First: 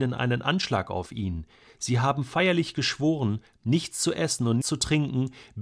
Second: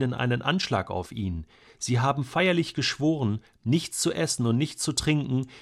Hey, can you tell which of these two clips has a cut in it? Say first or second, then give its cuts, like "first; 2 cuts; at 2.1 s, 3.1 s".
first; 1 cut; at 4.6 s